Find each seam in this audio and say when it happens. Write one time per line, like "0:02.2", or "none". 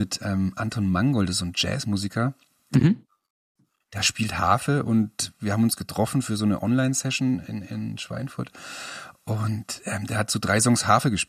none